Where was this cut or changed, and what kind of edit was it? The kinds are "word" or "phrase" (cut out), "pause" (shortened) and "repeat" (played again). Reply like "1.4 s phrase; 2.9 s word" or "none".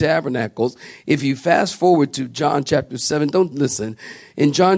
3.5 s phrase